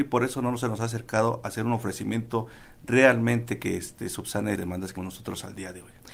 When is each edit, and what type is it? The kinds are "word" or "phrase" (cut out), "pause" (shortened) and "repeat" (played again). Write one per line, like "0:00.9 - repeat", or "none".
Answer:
0:04.6 - word
0:05.0 - word